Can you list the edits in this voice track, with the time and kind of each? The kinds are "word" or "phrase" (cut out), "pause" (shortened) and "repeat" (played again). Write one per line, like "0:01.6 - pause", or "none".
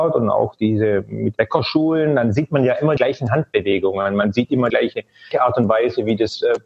0:01.4 - word
0:03.0 - word
0:04.7 - word